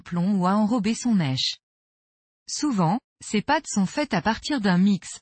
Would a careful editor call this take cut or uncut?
uncut